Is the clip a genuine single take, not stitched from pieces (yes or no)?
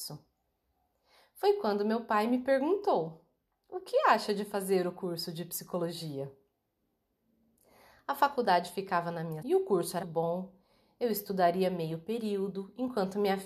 no